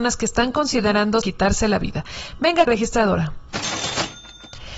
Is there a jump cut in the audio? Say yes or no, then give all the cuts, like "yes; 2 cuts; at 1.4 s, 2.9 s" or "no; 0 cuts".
yes; 2 cuts; at 1.2 s, 2.7 s